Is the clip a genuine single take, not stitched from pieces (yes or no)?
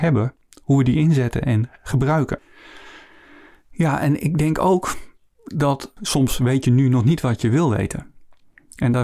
yes